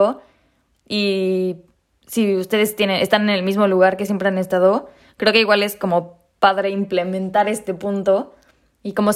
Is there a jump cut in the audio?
no; 0 cuts

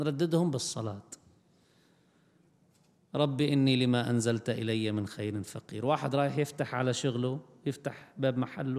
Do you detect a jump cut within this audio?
no; 0 cuts

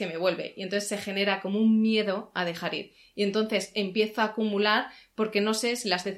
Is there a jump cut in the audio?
no; 0 cuts

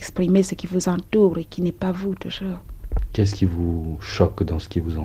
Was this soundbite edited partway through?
no; 0 cuts

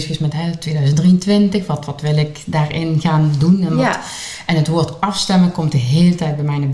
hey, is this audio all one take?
yes; 0 cuts

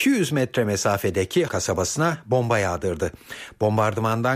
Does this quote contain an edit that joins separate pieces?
yes; 1 cut; at 1.5 s

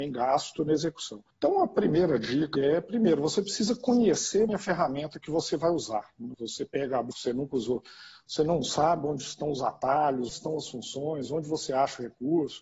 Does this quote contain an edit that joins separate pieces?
yes; 6 cuts; at 1.3 s, 2.5 s, 4.5 s, 6.3 s, 7.1 s, 10.3 s

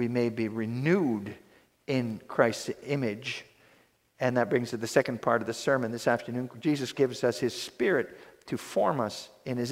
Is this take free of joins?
no; 2 cuts; at 4.7 s, 6.9 s

